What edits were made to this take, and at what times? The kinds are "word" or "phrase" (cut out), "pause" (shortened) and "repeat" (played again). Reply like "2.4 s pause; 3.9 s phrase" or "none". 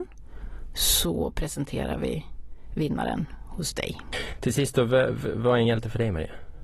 none

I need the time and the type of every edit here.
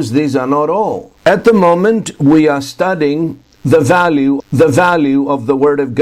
1.2 s pause; 4.4 s repeat

